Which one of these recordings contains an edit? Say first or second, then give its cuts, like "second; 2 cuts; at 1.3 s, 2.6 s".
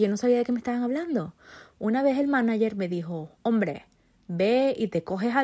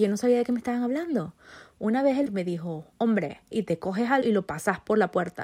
second; 3 cuts; at 2.3 s, 3.5 s, 4.2 s